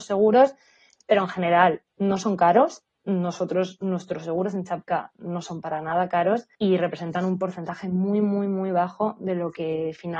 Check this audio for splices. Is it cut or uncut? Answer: cut